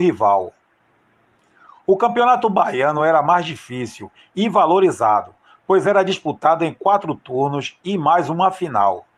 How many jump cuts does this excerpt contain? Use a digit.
0